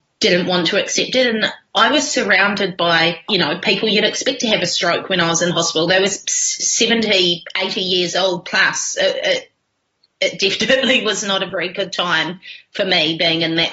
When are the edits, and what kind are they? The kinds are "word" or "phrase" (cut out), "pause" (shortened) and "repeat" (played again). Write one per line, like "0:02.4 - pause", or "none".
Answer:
none